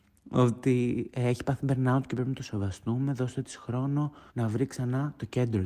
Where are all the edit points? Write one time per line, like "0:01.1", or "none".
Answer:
0:04.3